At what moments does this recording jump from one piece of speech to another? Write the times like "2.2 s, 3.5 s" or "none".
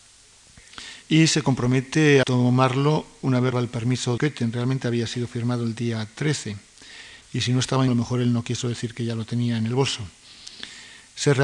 1.0 s, 2.2 s, 3.5 s, 4.2 s, 7.2 s, 7.9 s